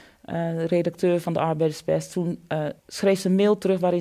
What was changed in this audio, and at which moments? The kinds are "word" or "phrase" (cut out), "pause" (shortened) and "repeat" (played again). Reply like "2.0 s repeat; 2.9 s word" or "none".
2.8 s pause